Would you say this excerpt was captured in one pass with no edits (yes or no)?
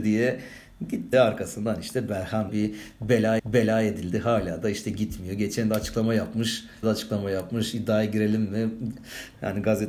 no